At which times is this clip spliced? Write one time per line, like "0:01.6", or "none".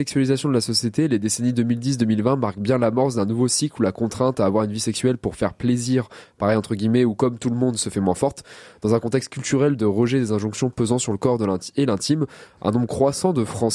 none